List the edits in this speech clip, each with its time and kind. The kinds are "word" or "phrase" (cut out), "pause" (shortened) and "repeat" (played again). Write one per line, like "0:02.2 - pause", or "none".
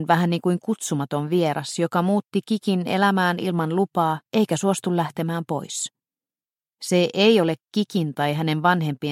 0:04.3 - pause